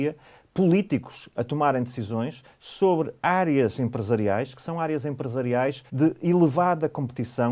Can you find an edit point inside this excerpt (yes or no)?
yes